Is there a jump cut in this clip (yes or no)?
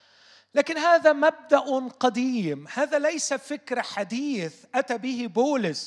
no